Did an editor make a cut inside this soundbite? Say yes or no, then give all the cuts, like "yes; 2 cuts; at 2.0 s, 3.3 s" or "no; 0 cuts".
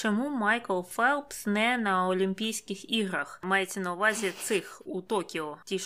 no; 0 cuts